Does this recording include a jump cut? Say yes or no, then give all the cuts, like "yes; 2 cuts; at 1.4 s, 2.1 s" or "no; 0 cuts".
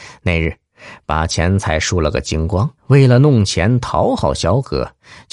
yes; 1 cut; at 2.8 s